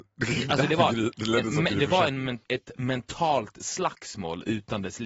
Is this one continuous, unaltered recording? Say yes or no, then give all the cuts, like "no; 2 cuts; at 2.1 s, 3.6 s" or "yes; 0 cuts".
no; 1 cut; at 2.4 s